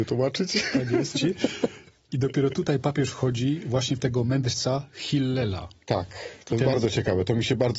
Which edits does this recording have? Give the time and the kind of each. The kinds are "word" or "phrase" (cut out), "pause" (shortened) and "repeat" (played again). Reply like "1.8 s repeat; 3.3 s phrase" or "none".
1.1 s word